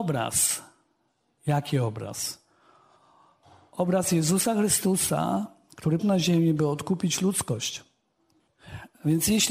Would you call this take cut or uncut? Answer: cut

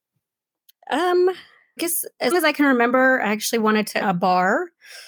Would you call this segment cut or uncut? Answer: cut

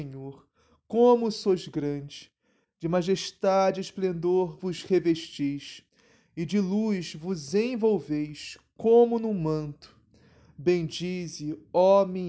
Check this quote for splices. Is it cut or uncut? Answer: uncut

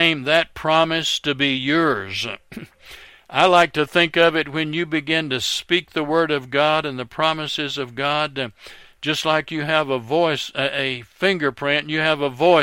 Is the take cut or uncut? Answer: uncut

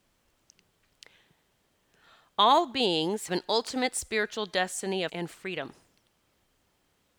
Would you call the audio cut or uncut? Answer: cut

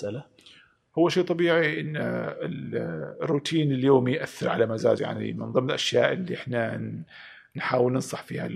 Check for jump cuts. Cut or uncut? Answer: cut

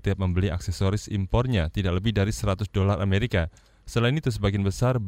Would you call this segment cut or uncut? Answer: uncut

